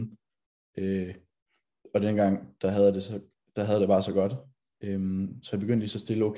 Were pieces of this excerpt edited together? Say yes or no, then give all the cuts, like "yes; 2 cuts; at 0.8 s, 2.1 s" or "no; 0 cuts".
no; 0 cuts